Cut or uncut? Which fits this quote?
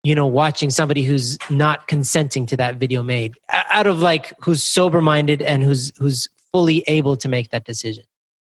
uncut